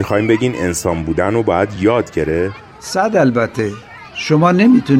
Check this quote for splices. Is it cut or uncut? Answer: uncut